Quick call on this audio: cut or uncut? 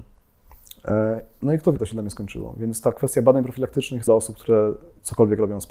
cut